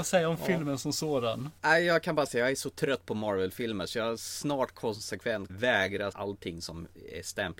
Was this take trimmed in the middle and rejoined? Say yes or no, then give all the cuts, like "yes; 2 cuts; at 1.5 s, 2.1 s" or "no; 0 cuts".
yes; 4 cuts; at 1.6 s, 2.3 s, 5.5 s, 6.1 s